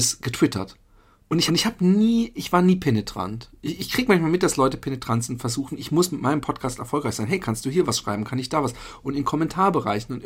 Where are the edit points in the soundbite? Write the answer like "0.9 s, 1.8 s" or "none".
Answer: 1.5 s